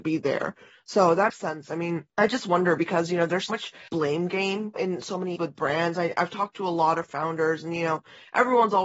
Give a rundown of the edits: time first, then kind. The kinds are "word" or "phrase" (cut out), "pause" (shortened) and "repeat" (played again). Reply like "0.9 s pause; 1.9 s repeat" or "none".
1.3 s word; 2.1 s pause; 3.5 s word; 3.9 s word; 4.8 s phrase; 5.4 s word